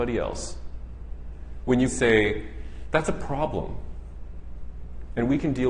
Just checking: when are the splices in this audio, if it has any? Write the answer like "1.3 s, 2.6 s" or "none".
1.9 s